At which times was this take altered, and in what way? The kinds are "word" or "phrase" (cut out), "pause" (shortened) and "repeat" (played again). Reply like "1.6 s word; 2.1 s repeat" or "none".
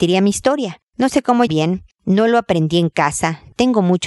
1.5 s word